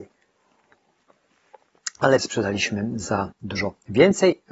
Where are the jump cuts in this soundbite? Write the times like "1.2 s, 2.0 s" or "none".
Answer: 2.2 s, 3.3 s